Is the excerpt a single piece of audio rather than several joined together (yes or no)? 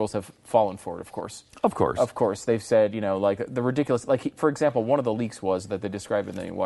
yes